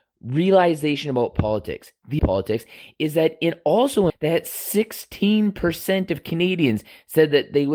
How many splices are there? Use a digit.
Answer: 2